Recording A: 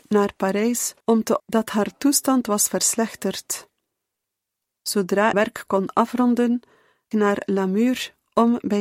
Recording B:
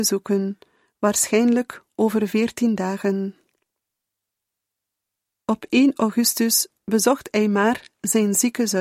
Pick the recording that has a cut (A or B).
A